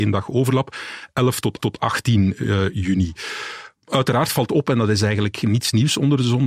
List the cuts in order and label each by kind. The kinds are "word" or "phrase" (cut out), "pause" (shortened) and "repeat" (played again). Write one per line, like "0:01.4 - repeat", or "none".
0:01.6 - repeat
0:03.8 - pause